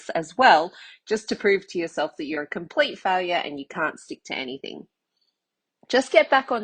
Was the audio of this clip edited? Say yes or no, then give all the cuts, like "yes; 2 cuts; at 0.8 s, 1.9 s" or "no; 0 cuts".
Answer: no; 0 cuts